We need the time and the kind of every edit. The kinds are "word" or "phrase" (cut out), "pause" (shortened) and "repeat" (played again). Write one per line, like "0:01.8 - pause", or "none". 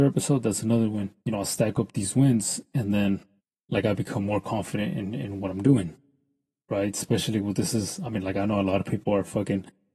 0:01.2 - pause
0:03.4 - pause